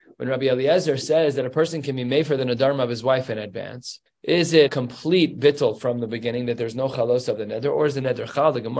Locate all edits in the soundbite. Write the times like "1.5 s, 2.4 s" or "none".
4.1 s, 4.7 s